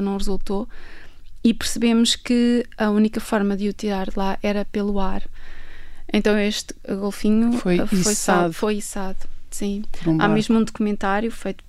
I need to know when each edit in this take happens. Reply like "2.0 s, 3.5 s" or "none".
none